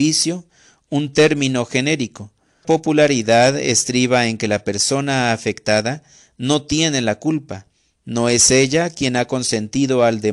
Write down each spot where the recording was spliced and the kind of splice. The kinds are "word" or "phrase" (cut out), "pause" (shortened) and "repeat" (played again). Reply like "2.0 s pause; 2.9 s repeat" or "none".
2.6 s word